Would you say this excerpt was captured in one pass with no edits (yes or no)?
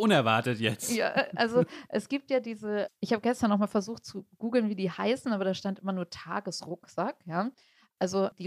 yes